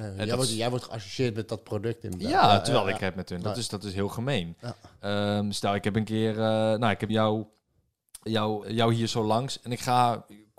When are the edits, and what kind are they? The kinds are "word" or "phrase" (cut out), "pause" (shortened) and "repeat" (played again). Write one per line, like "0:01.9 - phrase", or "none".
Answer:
0:03.0 - phrase
0:07.1 - word
0:08.3 - word
0:08.6 - word